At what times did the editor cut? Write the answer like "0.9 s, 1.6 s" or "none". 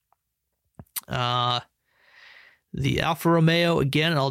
none